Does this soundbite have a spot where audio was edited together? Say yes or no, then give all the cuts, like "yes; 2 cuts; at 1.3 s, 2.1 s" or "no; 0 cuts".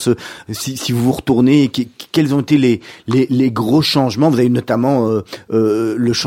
no; 0 cuts